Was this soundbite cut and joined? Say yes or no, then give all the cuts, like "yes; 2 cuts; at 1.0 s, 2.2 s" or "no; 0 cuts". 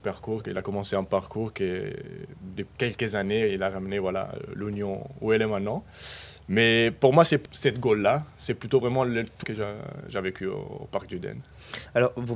yes; 3 cuts; at 2.7 s, 7.4 s, 9.4 s